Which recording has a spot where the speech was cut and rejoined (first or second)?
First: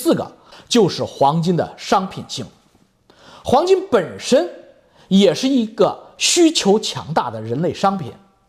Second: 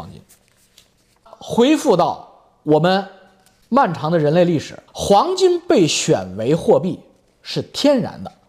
second